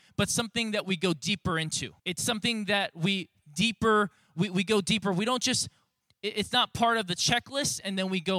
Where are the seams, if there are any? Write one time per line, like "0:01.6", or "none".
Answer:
0:02.0